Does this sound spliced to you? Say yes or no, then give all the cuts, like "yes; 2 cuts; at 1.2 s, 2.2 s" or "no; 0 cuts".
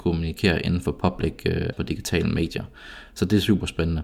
yes; 1 cut; at 1.7 s